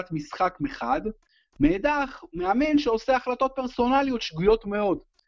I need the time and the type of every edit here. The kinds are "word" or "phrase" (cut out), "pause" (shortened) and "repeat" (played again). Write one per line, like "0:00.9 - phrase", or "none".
none

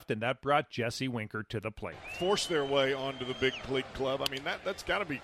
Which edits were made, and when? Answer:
none

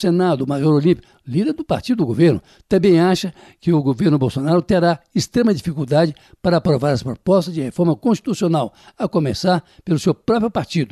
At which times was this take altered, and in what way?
none

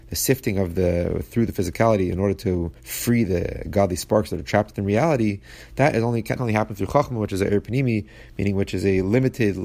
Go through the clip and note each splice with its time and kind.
0:02.8 - pause
0:06.4 - word

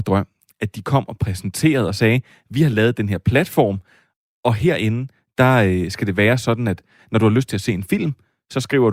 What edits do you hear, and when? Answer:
none

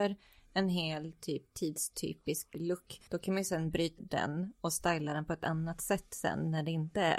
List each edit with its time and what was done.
0:03.1 - pause
0:04.0 - word

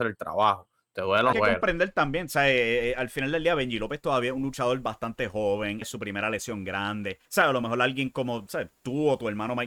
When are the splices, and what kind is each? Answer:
0:01.3 - phrase
0:05.8 - word
0:07.3 - pause

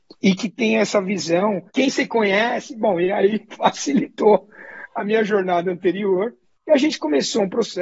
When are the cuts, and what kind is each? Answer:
0:01.7 - pause
0:06.4 - pause

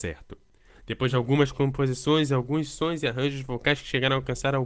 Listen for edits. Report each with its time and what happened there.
none

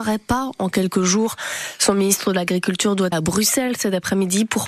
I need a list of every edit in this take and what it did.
0:03.1 - word

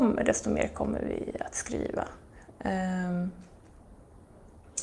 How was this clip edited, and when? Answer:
0:02.5 - pause

